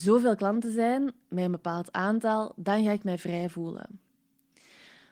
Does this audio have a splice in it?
no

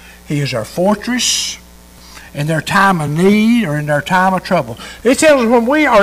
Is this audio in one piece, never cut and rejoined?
yes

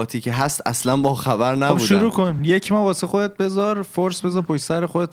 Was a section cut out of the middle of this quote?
no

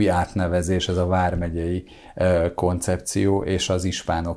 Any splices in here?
no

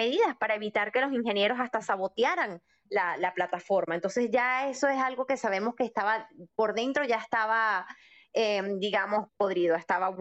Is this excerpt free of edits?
yes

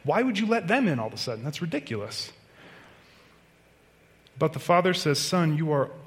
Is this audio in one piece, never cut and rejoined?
yes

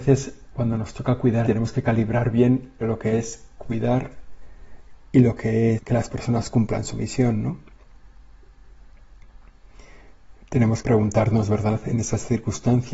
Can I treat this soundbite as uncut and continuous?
no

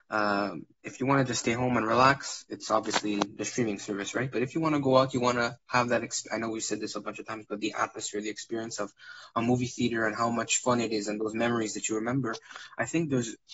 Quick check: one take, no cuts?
yes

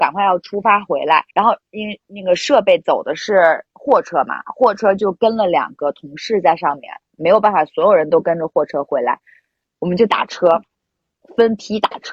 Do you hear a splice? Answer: yes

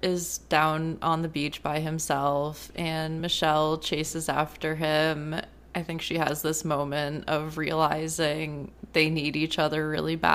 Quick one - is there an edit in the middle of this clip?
no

